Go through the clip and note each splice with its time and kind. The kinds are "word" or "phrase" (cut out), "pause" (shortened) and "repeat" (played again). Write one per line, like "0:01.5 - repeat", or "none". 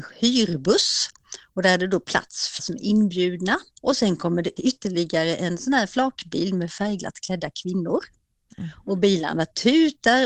0:02.6 - phrase
0:03.7 - pause
0:04.6 - word